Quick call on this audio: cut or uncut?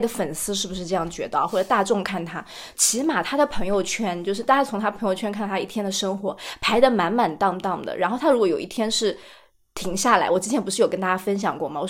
uncut